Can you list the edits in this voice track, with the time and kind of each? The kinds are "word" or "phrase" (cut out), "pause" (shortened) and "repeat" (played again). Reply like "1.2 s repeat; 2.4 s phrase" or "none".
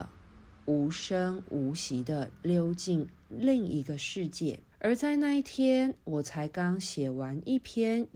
4.7 s pause